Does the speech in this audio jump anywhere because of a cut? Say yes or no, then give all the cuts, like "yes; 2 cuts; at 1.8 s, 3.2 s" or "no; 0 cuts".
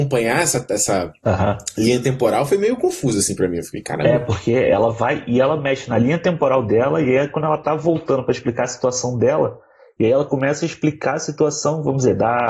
no; 0 cuts